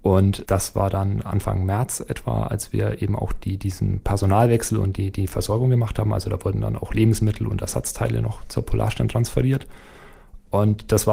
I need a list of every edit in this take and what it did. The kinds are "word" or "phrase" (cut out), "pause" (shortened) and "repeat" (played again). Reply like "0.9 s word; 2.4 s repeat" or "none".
none